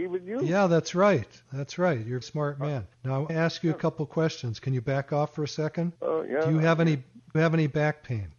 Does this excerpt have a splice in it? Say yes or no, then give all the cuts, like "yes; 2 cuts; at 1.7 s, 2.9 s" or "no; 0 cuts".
yes; 6 cuts; at 1.4 s, 2.2 s, 2.9 s, 3.3 s, 6.0 s, 7.3 s